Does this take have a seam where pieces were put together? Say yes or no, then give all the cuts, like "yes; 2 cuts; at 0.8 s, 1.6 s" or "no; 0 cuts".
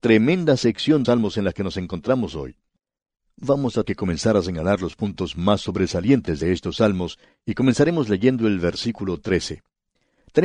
yes; 2 cuts; at 1.0 s, 3.8 s